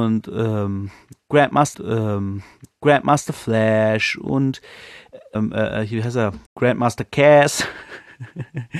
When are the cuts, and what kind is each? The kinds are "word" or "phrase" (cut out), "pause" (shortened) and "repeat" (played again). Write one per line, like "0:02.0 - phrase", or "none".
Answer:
0:01.7 - repeat
0:05.3 - word
0:06.5 - pause